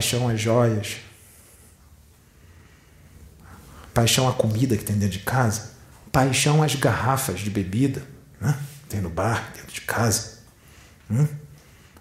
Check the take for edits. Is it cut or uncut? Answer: uncut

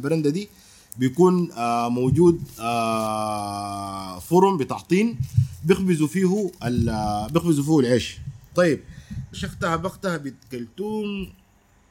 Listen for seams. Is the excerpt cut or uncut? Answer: cut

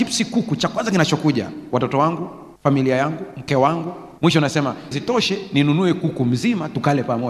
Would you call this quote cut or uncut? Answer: cut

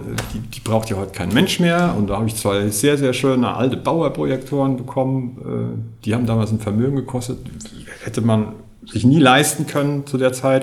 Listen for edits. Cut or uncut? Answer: uncut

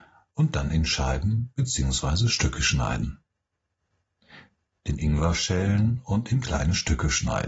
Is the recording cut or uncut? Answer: uncut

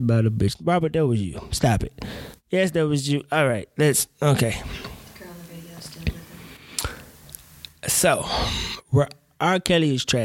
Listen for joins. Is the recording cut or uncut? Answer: uncut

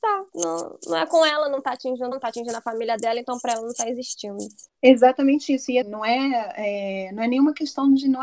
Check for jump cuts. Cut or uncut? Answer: cut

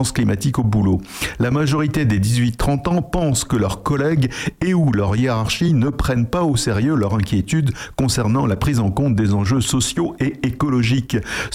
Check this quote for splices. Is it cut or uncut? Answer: uncut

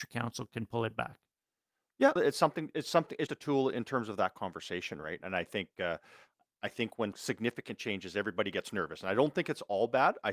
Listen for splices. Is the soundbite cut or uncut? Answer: cut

